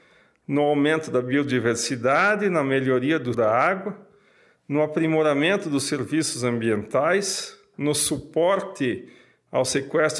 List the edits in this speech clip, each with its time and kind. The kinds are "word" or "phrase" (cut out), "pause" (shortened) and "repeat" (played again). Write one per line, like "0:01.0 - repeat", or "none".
0:03.3 - word